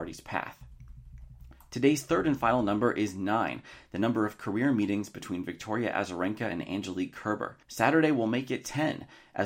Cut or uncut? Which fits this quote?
cut